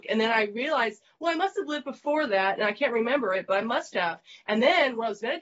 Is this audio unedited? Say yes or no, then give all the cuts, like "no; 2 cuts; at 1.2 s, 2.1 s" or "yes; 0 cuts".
yes; 0 cuts